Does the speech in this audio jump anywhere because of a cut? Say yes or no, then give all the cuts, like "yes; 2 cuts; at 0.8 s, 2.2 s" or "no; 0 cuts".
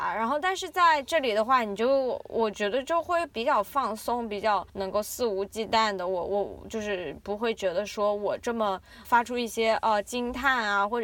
no; 0 cuts